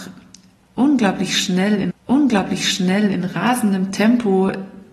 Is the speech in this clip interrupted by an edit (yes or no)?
yes